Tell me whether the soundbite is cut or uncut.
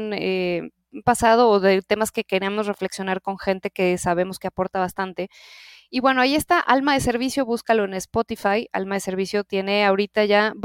uncut